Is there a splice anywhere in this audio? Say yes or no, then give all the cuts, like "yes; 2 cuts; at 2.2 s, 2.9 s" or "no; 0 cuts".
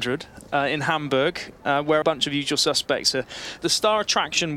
yes; 2 cuts; at 2.0 s, 3.6 s